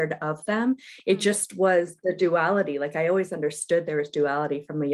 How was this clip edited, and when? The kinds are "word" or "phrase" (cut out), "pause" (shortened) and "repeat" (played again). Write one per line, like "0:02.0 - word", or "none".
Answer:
none